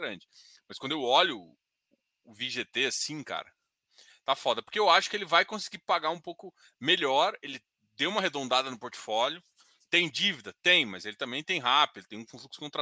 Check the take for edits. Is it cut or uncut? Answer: uncut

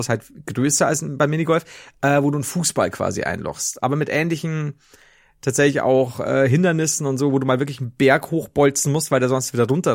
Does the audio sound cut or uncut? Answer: uncut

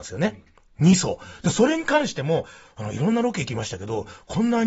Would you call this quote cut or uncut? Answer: uncut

